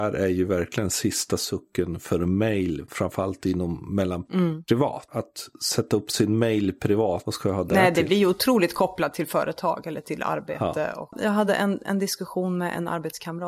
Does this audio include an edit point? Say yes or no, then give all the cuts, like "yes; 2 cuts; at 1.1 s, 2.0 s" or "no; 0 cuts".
no; 0 cuts